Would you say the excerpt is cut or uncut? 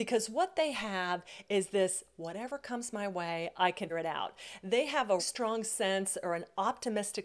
cut